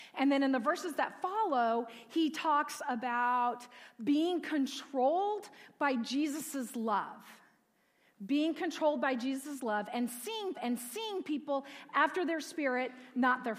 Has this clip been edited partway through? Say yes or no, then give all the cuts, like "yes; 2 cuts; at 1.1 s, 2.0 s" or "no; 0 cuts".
yes; 1 cut; at 10.5 s